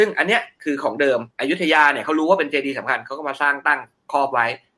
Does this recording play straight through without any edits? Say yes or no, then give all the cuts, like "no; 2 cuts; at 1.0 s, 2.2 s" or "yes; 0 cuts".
no; 1 cut; at 1.3 s